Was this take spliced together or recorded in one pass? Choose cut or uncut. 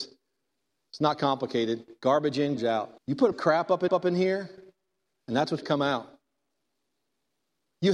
cut